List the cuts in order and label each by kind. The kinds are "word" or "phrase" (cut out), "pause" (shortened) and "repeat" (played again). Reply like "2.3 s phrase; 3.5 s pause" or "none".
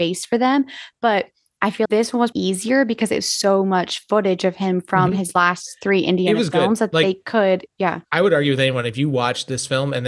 1.9 s word; 2.3 s word; 8.1 s pause